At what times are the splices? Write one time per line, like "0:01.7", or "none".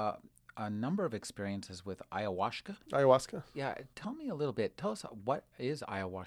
0:02.8

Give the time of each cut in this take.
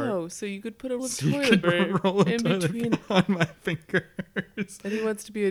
0:01.0
0:01.6
0:02.9

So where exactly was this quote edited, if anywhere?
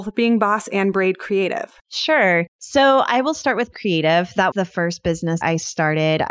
0:01.8
0:03.7
0:04.5
0:05.4

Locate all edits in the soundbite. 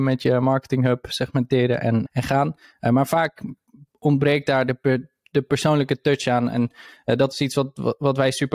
0:02.1

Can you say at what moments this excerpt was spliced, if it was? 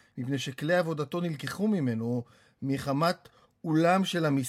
none

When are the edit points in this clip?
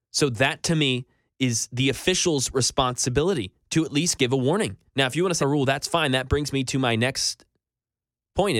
0:04.9
0:05.4

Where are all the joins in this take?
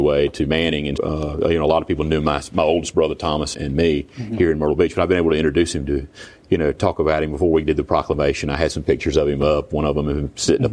0:01.0
0:03.5

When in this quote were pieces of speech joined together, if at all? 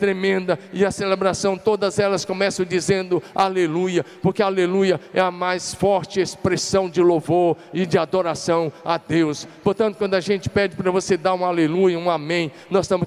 none

